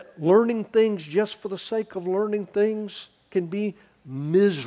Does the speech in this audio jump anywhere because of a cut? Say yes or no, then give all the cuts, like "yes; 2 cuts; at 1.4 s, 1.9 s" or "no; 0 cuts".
no; 0 cuts